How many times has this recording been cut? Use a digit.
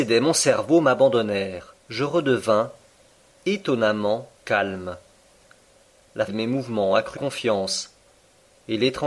4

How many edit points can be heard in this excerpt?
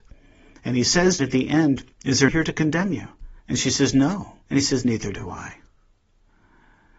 6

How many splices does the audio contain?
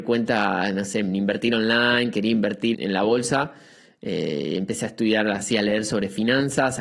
1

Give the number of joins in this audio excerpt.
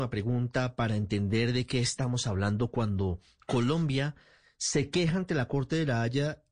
0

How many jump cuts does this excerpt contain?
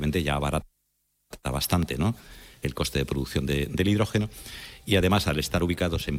0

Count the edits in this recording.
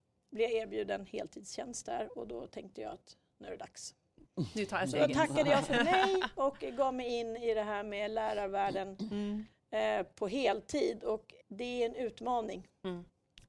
1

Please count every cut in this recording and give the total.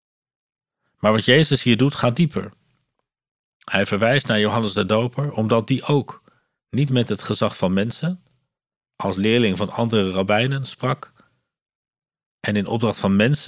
0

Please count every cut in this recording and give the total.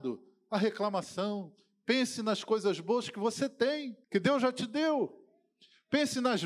1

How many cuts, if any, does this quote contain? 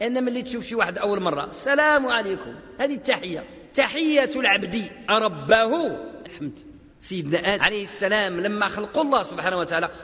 2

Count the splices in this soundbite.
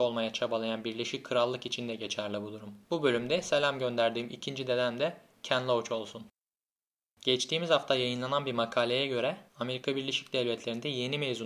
3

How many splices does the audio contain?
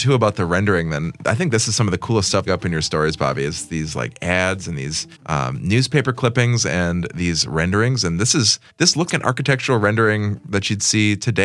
4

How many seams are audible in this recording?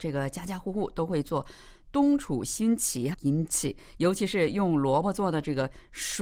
1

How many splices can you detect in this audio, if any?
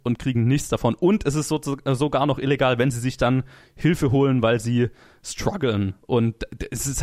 0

